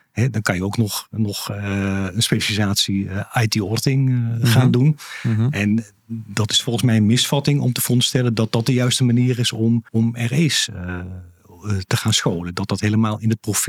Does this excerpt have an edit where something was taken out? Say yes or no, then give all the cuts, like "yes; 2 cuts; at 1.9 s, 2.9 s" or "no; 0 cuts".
yes; 1 cut; at 9.9 s